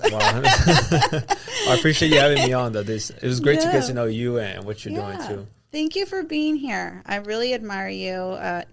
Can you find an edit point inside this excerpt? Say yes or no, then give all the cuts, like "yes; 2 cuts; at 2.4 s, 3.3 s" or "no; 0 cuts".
no; 0 cuts